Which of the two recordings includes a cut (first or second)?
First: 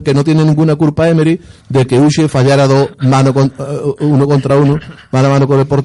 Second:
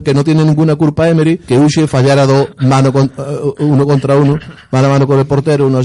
second